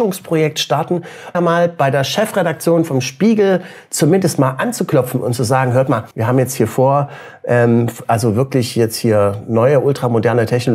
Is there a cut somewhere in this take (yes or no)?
yes